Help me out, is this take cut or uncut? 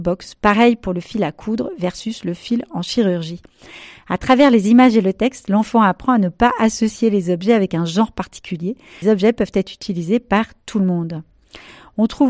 cut